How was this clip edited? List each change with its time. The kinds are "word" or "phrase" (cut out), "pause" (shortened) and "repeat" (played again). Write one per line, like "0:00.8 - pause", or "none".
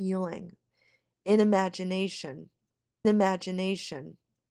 0:03.0 - repeat